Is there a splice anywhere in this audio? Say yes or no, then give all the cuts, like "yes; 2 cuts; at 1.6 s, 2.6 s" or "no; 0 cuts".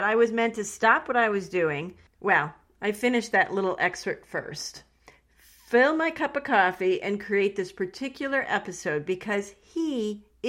no; 0 cuts